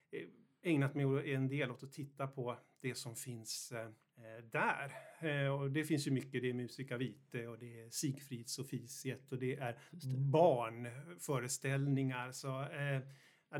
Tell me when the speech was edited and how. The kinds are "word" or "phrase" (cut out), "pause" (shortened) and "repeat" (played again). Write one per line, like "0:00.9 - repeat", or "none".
0:09.9 - pause